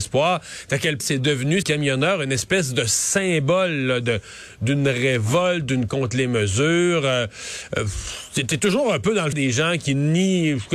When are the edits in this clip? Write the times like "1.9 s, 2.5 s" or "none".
1.0 s, 1.6 s, 5.9 s, 9.3 s